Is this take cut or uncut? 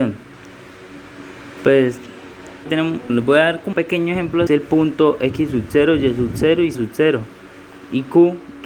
cut